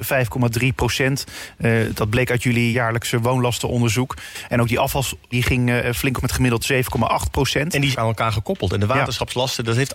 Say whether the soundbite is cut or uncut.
cut